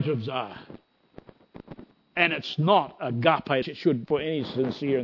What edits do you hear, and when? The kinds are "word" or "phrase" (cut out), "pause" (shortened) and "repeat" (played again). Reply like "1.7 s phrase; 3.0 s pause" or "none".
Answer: 1.9 s pause; 3.6 s phrase; 4.1 s word